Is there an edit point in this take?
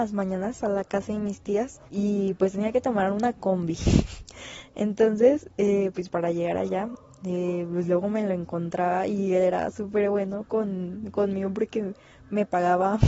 yes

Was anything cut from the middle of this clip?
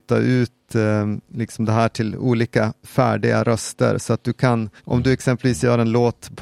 yes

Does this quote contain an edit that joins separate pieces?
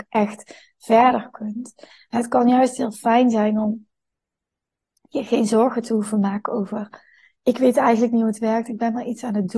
no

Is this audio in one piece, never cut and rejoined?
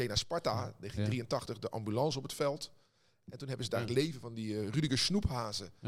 yes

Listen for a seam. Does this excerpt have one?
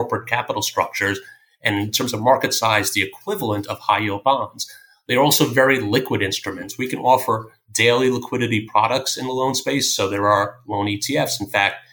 no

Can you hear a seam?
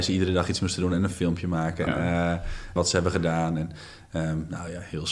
yes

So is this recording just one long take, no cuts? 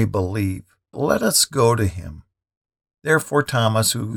no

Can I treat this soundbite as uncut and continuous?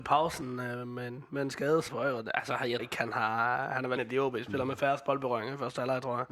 no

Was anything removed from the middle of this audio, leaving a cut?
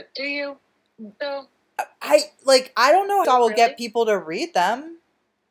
yes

